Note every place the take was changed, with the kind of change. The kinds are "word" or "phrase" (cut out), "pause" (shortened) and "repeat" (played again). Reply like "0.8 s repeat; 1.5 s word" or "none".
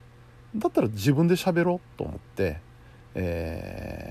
none